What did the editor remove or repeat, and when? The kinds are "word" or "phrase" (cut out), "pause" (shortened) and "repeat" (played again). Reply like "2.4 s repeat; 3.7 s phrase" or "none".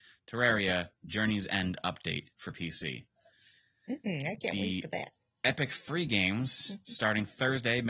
none